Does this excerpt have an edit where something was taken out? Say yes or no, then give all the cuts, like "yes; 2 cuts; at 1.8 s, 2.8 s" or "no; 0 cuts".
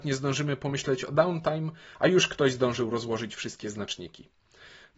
no; 0 cuts